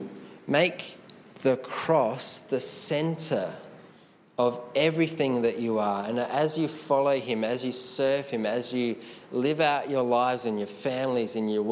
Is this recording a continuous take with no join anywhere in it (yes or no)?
yes